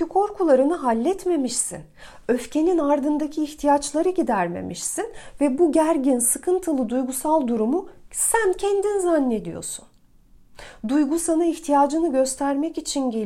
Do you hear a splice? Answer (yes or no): no